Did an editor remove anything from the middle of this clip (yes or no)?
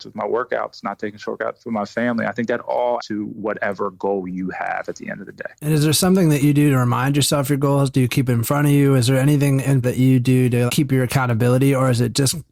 yes